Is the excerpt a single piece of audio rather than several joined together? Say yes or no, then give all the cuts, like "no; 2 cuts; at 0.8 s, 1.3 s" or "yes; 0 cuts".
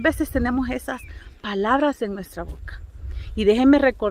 yes; 0 cuts